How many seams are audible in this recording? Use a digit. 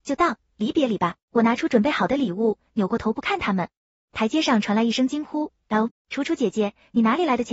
2